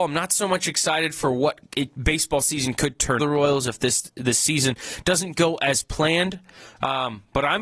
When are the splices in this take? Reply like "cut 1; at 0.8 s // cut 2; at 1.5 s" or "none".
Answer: cut 1; at 3.2 s